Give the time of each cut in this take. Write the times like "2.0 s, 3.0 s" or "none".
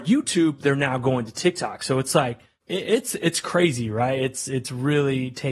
none